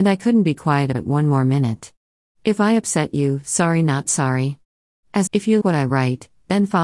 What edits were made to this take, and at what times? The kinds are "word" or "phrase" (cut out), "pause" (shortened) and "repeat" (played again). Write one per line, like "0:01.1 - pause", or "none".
0:00.9 - word
0:05.3 - word
0:05.6 - word